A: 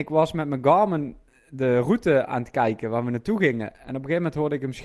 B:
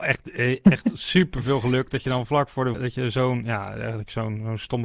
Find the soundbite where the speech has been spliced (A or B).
B